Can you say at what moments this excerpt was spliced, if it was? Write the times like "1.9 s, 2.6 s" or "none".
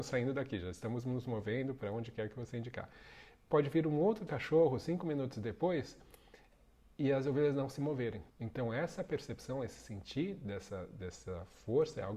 8.3 s